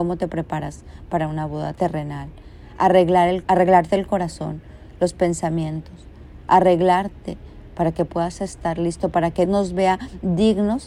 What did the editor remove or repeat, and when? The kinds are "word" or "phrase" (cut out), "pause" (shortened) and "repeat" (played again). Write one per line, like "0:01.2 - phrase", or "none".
0:03.4 - word
0:09.5 - word